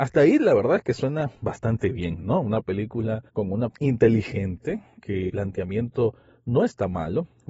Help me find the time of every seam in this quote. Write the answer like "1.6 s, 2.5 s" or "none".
3.3 s, 3.7 s, 5.3 s